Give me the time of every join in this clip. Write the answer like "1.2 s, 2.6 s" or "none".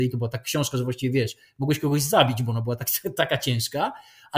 none